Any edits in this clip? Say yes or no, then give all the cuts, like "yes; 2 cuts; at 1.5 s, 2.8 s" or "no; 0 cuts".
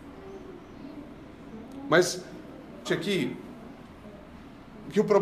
yes; 1 cut; at 2.8 s